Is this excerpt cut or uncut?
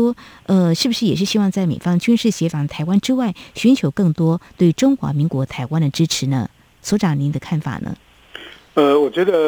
uncut